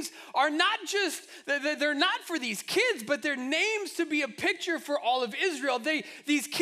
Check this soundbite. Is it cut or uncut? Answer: uncut